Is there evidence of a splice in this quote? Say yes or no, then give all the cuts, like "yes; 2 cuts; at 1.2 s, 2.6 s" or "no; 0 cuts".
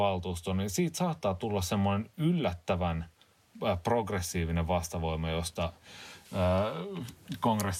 no; 0 cuts